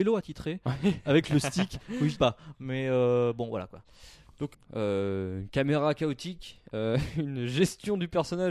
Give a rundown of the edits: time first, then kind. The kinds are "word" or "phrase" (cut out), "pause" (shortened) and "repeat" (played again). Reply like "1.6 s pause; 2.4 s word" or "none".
2.2 s word; 4.5 s word